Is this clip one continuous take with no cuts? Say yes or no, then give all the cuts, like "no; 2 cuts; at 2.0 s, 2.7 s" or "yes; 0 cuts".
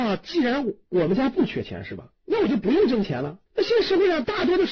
no; 2 cuts; at 2.2 s, 3.5 s